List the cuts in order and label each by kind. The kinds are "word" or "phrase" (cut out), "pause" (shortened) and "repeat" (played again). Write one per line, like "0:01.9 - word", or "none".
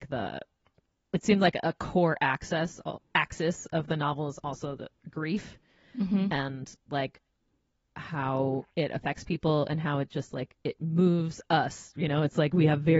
none